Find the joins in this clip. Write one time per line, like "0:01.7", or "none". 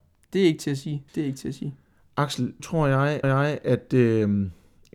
0:01.1
0:02.6
0:03.2